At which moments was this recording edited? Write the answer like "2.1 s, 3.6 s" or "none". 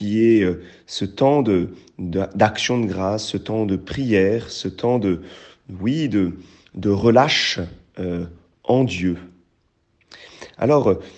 none